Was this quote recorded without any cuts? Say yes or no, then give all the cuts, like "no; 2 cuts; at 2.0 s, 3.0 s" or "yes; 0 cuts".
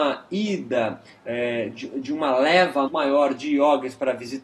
no; 1 cut; at 2.9 s